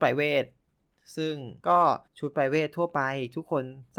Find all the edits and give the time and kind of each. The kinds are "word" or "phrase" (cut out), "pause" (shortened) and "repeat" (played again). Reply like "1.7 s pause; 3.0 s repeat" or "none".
1.6 s pause; 2.1 s pause